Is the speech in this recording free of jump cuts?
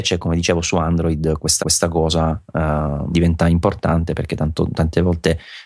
no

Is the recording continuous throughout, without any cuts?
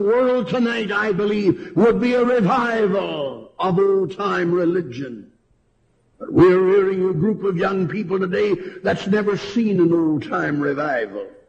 yes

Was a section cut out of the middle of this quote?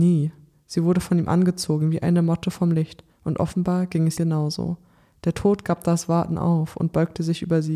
yes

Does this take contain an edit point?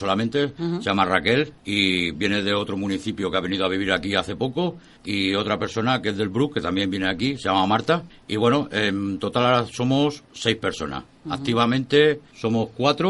yes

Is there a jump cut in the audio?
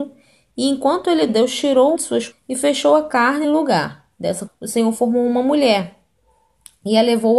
yes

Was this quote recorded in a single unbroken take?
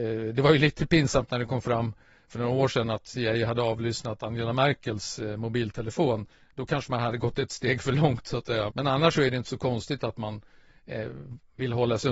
no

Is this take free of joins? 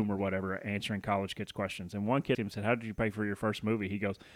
no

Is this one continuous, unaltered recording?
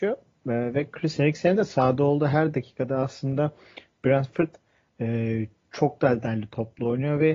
yes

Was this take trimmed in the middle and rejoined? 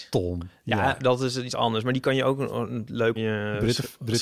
yes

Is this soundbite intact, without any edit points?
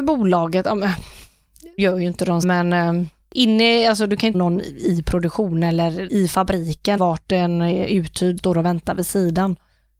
no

